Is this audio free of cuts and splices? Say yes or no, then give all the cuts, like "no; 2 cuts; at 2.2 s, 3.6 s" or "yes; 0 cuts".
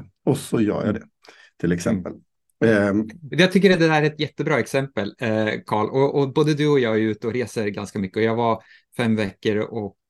yes; 0 cuts